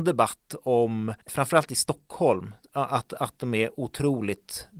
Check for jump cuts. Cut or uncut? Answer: cut